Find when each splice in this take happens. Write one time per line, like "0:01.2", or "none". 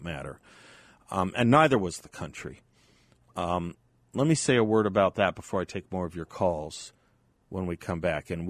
none